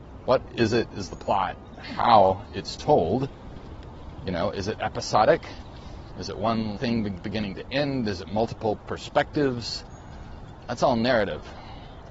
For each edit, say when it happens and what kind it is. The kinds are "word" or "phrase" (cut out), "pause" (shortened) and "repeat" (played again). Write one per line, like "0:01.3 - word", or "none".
0:06.8 - word
0:07.2 - word